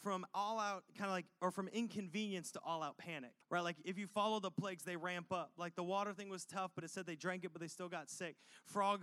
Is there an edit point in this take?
yes; 1 cut; at 3.4 s

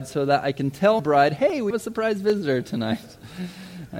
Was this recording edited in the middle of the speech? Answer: yes; 2 cuts; at 1.0 s, 1.7 s

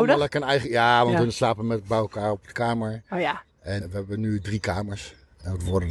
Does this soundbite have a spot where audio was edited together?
yes; 1 cut; at 3.8 s

